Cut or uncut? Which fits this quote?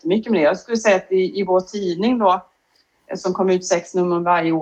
uncut